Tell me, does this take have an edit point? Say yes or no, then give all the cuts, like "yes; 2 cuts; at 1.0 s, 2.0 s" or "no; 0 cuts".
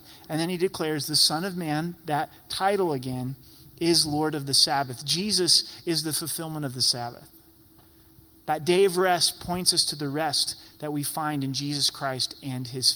no; 0 cuts